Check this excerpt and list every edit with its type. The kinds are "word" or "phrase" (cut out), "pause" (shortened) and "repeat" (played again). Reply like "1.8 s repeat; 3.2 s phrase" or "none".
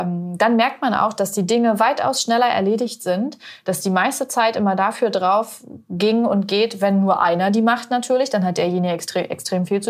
none